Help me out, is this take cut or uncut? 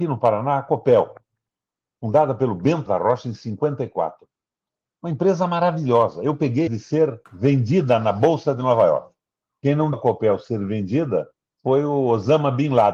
cut